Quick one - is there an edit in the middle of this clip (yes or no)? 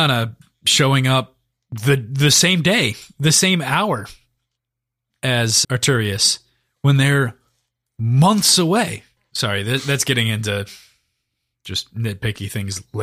yes